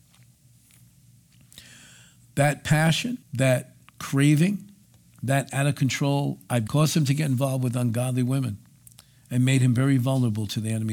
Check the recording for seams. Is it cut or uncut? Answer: cut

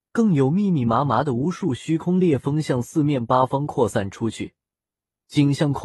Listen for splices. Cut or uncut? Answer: uncut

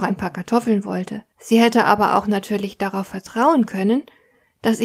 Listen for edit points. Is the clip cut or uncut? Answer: cut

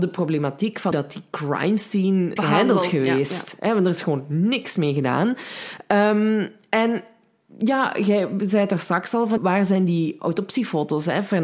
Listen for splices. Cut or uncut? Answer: cut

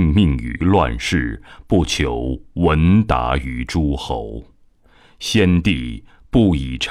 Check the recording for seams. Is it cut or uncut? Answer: uncut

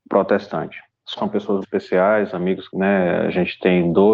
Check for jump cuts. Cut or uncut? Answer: cut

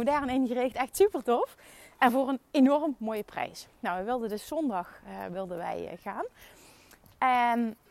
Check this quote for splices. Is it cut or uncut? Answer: uncut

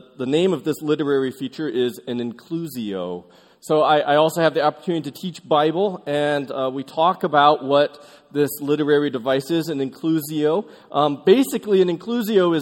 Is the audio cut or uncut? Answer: uncut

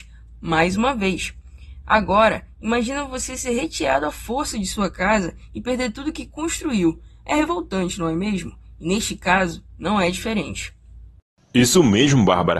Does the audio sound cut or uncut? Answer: uncut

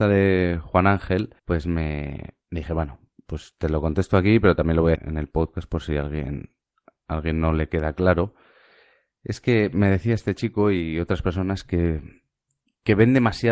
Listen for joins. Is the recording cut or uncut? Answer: cut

